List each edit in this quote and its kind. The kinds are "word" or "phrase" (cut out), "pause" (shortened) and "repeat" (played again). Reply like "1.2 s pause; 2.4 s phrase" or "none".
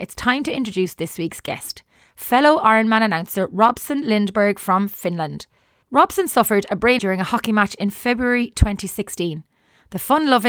7.0 s word